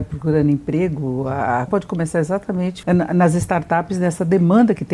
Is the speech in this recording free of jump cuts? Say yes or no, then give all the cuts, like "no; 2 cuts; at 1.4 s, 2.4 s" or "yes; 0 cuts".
no; 2 cuts; at 1.7 s, 2.8 s